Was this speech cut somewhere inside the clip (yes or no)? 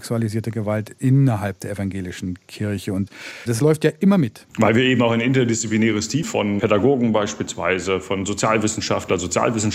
yes